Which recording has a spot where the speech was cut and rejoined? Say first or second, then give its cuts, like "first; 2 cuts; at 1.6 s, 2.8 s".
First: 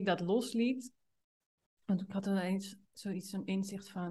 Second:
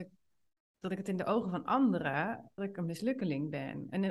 second; 1 cut; at 2.6 s